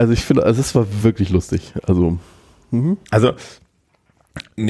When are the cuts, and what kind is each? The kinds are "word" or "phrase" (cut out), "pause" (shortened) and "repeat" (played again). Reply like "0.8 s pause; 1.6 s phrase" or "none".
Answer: none

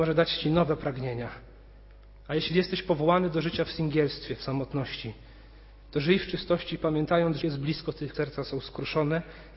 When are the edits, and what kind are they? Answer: 7.4 s word; 8.1 s word

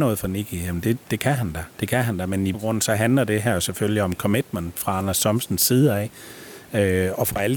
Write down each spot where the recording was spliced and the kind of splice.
1.0 s word; 1.7 s pause; 2.5 s word

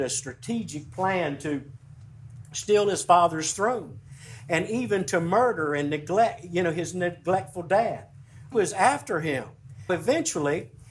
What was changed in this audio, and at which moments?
8.5 s phrase; 9.9 s word

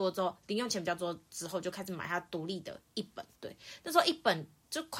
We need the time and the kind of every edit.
3.4 s pause

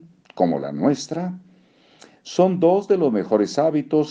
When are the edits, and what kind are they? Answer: none

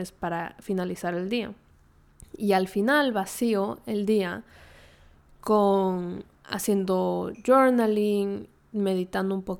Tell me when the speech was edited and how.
none

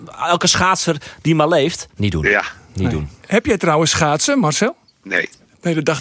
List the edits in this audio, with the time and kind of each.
1.9 s pause; 4.9 s pause

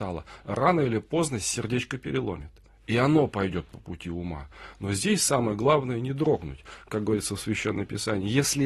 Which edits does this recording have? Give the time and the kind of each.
none

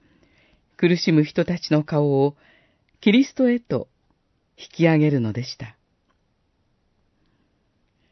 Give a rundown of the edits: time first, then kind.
none

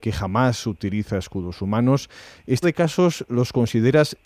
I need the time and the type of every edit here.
2.6 s word

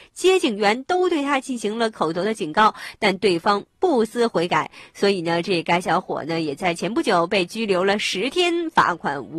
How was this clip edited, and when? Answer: none

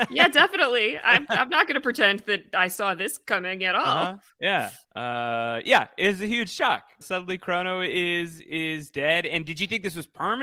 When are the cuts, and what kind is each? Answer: 4.8 s pause; 7.0 s word

